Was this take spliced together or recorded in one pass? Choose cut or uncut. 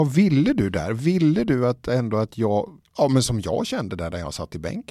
uncut